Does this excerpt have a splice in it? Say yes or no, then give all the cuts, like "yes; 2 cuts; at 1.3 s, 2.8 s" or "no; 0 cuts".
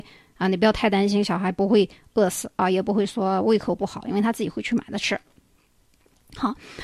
no; 0 cuts